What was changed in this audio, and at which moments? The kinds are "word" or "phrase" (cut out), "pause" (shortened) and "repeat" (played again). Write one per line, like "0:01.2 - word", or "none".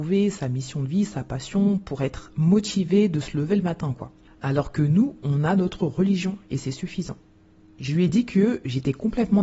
none